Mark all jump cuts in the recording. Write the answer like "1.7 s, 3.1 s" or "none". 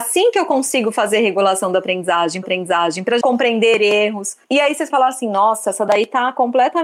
2.4 s, 3.2 s, 4.4 s, 4.9 s